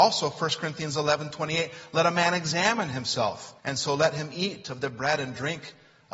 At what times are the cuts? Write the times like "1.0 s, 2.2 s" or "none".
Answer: 3.6 s